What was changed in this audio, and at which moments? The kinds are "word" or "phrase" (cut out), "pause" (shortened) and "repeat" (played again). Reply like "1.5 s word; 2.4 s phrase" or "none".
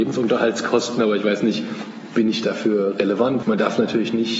3.4 s word